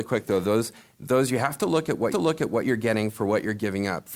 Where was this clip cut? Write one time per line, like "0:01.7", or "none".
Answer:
0:02.1

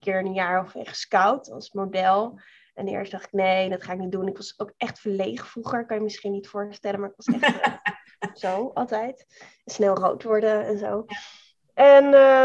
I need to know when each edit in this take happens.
none

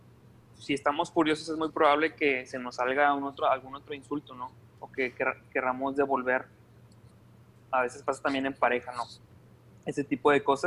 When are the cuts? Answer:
none

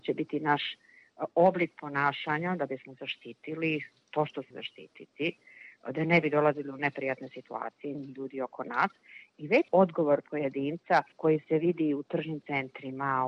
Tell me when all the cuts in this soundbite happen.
0:04.5
0:07.9
0:09.7
0:11.1

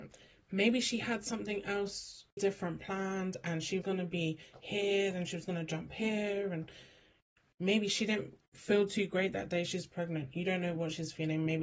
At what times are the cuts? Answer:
0:02.4
0:03.8

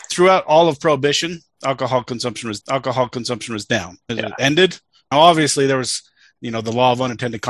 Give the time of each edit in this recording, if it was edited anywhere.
0:02.6
0:04.1
0:05.1

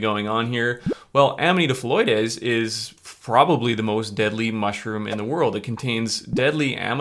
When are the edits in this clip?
0:03.0

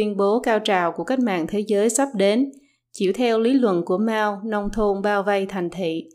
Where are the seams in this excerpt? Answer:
none

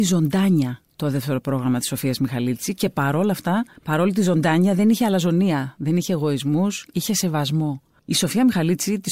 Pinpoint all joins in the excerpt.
0:03.8

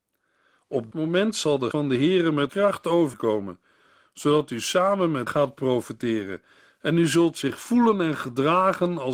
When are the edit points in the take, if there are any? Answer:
0:00.9
0:01.7
0:02.5
0:03.1
0:05.3

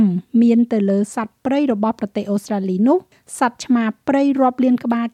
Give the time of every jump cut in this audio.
0:03.1

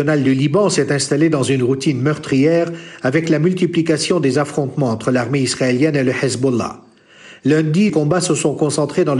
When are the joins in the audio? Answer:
0:07.9

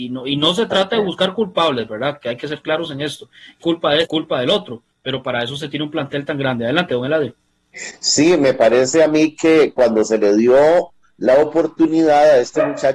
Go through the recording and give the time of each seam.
0:03.6
0:04.0
0:04.9

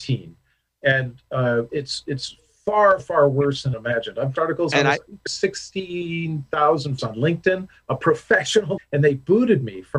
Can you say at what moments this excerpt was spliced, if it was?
0:01.7
0:03.0
0:03.7
0:04.4
0:05.3
0:07.0
0:08.8

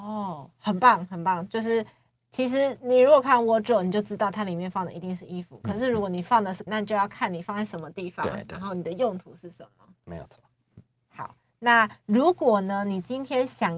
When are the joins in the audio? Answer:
0:06.7

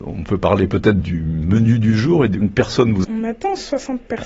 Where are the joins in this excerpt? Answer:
0:02.4
0:03.0

